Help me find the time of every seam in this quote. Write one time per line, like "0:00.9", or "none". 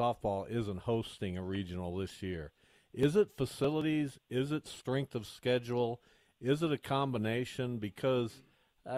none